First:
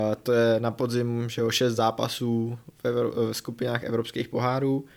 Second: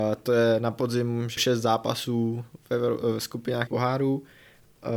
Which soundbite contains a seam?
second; 2 cuts; at 1.4 s, 3.7 s

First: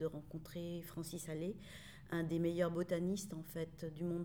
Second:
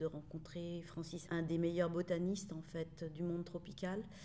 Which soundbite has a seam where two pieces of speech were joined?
second; 1 cut; at 1.3 s

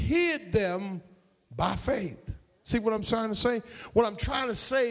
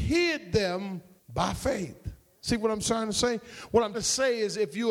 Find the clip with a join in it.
second; 2 cuts; at 1.2 s, 3.9 s

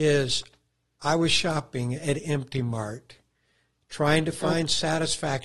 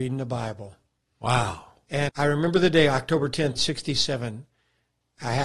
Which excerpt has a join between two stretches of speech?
second; 2 cuts; at 2.1 s, 3.6 s

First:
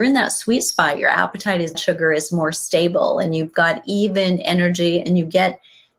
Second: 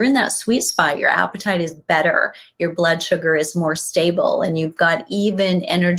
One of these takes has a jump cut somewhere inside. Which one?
first; 1 cut; at 1.7 s

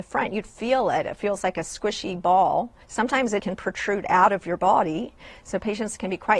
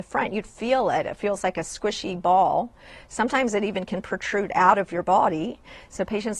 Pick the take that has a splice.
first; 2 cuts; at 2.8 s, 3.4 s

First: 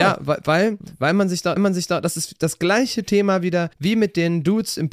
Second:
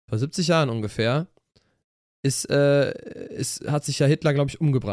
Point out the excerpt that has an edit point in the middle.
first; 2 cuts; at 1.6 s, 3.7 s

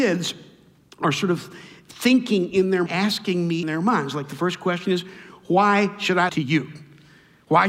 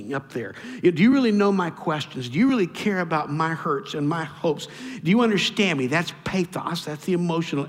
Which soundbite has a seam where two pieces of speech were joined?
first; 3 cuts; at 2.9 s, 3.6 s, 6.3 s

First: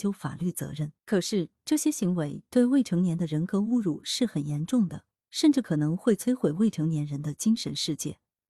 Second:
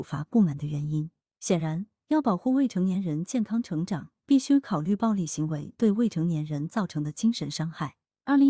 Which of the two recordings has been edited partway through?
first; 1 cut; at 1.0 s

